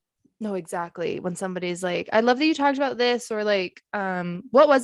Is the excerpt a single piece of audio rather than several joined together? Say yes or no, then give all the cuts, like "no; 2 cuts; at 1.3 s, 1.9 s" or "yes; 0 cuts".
yes; 0 cuts